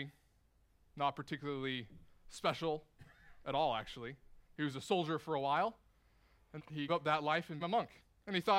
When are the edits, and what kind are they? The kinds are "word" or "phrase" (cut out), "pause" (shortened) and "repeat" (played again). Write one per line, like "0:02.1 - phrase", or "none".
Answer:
0:06.6 - word
0:06.9 - word
0:07.6 - word